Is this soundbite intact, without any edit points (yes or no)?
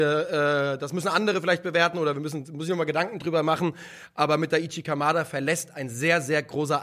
yes